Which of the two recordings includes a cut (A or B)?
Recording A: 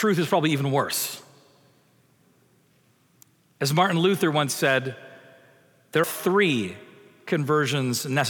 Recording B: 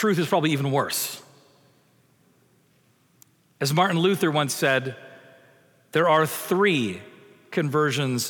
A